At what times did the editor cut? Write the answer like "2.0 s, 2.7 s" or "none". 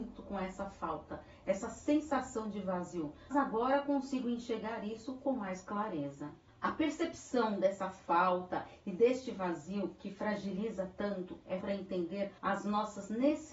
3.3 s, 6.5 s, 11.6 s, 12.4 s